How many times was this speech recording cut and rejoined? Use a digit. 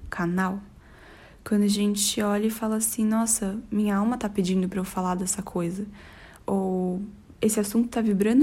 0